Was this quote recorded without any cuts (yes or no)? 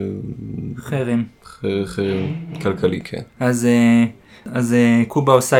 no